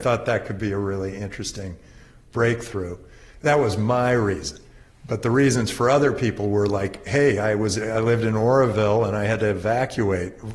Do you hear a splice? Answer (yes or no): no